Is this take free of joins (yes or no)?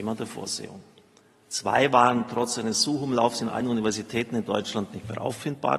yes